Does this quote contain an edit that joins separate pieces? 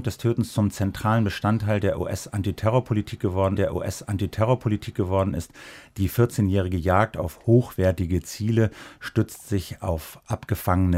yes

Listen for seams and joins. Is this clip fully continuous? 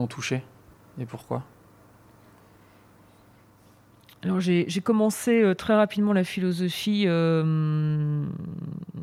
yes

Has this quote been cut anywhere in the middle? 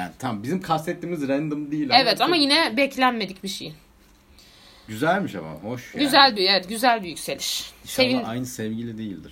no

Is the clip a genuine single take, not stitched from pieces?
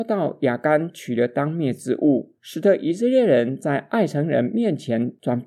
no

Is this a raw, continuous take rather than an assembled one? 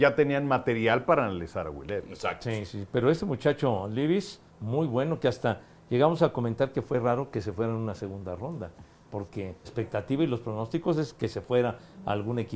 no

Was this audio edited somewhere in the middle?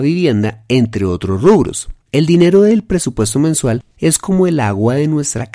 yes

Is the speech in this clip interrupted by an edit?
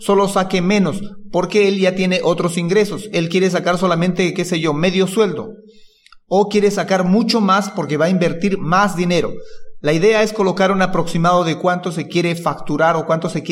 no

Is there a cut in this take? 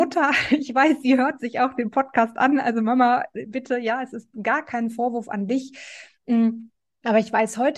no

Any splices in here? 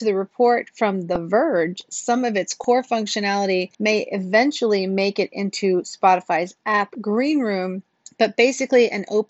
yes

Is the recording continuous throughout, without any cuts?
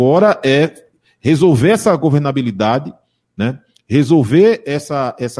yes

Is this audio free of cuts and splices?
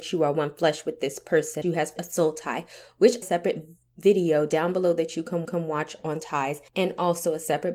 no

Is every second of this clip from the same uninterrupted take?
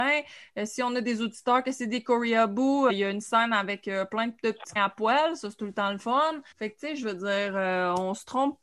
no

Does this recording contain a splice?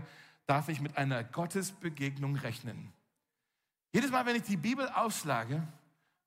no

